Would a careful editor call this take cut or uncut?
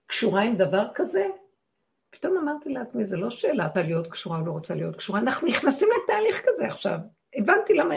cut